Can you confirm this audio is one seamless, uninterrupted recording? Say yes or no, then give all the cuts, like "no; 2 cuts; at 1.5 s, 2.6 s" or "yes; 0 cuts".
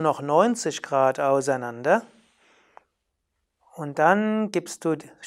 yes; 0 cuts